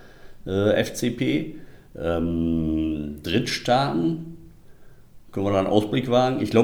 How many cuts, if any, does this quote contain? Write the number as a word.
zero